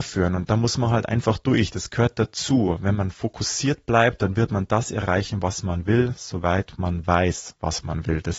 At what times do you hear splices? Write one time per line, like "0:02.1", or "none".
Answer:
none